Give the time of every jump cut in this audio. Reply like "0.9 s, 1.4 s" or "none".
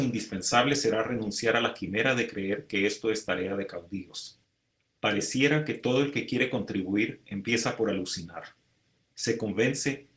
none